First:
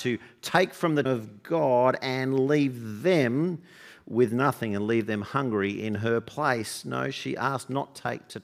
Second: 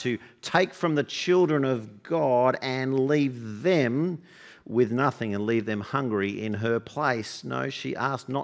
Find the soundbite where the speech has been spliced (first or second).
first